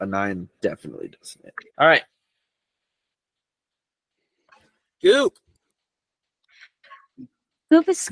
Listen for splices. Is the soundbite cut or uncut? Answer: cut